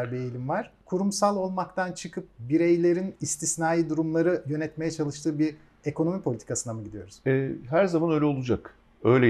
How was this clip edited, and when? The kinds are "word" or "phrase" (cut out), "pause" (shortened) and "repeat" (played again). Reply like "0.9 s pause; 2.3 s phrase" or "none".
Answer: none